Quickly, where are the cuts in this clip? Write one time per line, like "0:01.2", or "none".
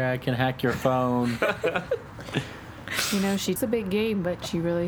0:03.6